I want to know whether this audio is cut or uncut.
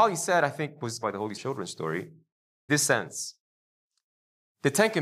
cut